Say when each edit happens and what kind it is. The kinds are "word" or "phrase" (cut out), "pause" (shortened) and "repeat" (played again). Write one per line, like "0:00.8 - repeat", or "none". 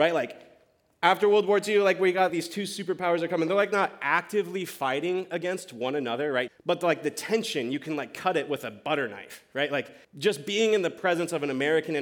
0:02.3 - word
0:06.5 - word
0:10.0 - pause

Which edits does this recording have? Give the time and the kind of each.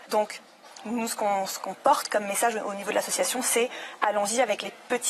none

